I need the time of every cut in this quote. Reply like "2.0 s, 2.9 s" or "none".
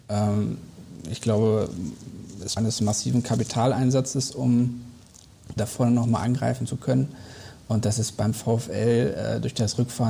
2.6 s, 5.6 s